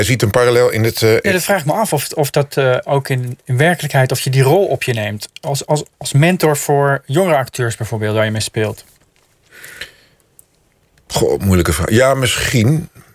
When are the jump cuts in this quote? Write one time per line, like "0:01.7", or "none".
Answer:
none